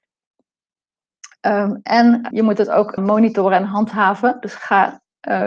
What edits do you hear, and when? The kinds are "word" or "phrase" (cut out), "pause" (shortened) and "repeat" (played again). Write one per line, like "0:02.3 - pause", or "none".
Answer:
0:02.3 - word
0:03.0 - phrase